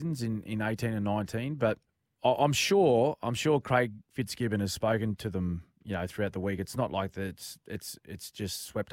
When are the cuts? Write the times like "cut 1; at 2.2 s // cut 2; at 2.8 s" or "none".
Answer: cut 1; at 1.8 s